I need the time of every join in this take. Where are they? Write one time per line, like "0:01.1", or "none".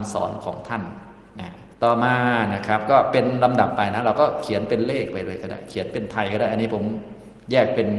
0:01.7